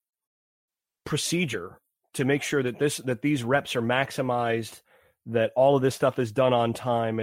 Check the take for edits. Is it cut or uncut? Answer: uncut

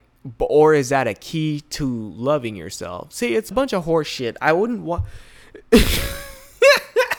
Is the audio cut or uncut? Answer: cut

